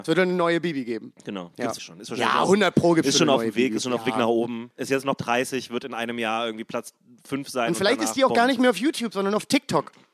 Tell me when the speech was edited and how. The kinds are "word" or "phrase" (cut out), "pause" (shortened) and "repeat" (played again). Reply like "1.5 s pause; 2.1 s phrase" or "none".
1.8 s word; 5.2 s word